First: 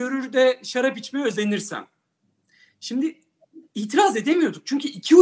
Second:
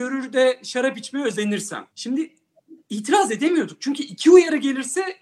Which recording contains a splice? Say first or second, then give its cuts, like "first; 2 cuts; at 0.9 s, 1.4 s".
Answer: second; 1 cut; at 1.9 s